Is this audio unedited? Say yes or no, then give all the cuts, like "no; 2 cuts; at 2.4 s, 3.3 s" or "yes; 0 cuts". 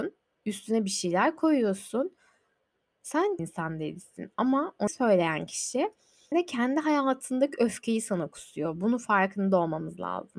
no; 3 cuts; at 3.4 s, 4.9 s, 6.3 s